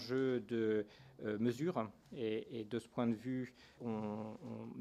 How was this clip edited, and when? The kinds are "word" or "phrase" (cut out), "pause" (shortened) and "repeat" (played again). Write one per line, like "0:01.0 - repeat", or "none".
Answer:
0:03.8 - word